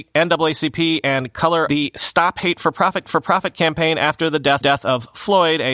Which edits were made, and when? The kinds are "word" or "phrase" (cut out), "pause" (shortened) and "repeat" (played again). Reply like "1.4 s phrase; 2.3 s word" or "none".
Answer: 1.7 s phrase; 3.0 s repeat; 4.6 s repeat